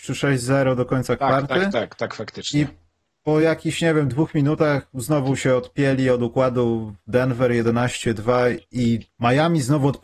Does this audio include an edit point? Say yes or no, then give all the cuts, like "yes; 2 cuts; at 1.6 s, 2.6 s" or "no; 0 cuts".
no; 0 cuts